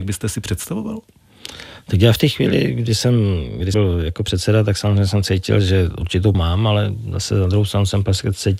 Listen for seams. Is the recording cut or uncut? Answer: cut